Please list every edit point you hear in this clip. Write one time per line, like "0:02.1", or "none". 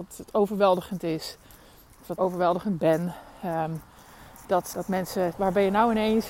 0:02.2
0:04.7
0:05.3